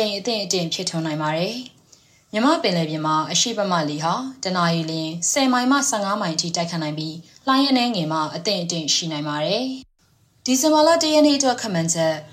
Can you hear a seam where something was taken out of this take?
no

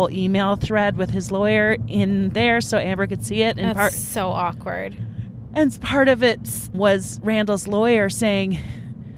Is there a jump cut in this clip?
yes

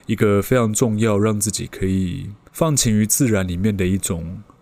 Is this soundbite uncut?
no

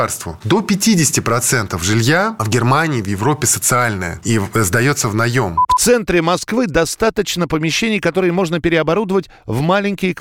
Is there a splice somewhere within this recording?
no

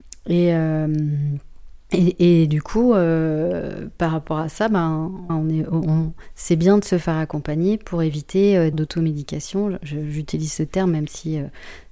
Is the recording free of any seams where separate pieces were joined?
no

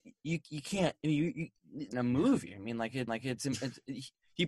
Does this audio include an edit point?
yes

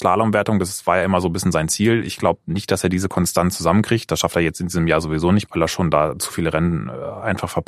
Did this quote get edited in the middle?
no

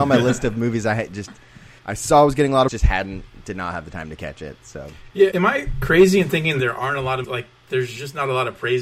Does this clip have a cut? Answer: yes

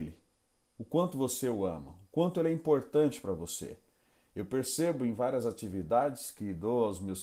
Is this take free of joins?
yes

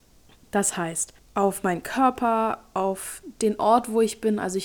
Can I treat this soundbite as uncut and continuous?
no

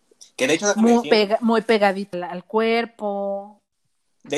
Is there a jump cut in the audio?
yes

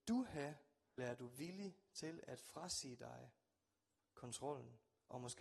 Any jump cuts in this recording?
yes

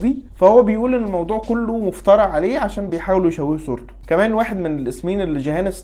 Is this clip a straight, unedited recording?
yes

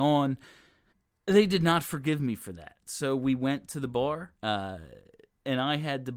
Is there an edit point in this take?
yes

